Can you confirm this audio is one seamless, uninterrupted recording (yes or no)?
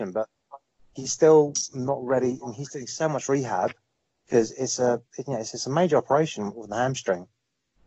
yes